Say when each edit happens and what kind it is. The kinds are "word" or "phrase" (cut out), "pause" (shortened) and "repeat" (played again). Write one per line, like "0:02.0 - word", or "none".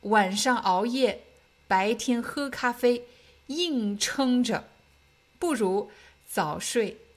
none